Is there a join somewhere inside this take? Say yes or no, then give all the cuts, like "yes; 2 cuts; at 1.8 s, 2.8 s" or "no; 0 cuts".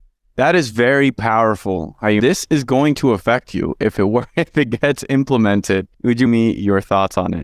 yes; 3 cuts; at 2.2 s, 5.9 s, 6.3 s